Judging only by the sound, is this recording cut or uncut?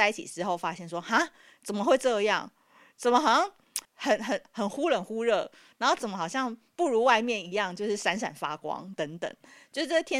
cut